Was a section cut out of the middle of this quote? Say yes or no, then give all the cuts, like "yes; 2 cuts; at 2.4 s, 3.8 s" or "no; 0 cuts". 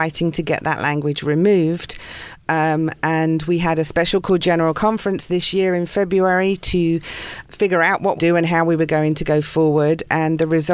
yes; 2 cuts; at 7.4 s, 8.2 s